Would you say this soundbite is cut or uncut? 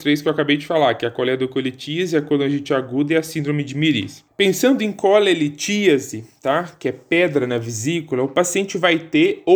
cut